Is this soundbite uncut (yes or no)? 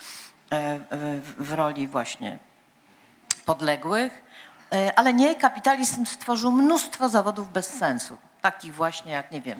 yes